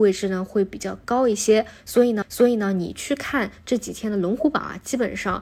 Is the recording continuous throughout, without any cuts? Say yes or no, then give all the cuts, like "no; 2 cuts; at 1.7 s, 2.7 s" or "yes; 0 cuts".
no; 1 cut; at 2.2 s